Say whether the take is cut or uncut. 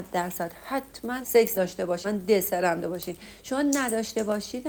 cut